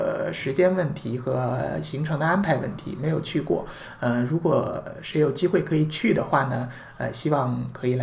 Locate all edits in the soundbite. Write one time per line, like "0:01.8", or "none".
none